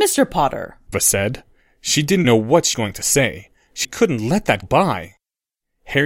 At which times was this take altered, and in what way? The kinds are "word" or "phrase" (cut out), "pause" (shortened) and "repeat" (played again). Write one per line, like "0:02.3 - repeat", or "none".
0:00.9 - word
0:02.2 - word
0:02.7 - word
0:03.8 - word
0:04.6 - word